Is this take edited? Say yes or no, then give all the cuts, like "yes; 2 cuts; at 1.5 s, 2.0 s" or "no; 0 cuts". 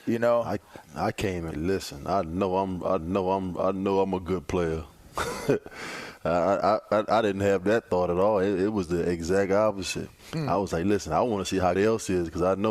yes; 4 cuts; at 1.5 s, 3.0 s, 10.2 s, 11.8 s